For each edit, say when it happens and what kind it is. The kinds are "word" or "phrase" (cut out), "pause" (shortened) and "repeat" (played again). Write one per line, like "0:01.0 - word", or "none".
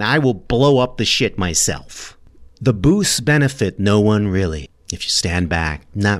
none